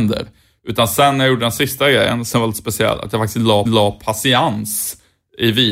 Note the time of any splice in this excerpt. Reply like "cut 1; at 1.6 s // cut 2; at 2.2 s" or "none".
cut 1; at 3.7 s